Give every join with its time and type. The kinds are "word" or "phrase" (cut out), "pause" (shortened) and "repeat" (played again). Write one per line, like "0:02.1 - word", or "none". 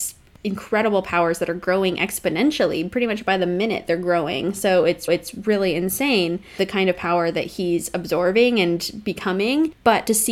0:05.1 - repeat